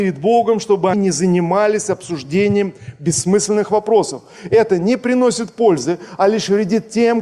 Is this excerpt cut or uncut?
cut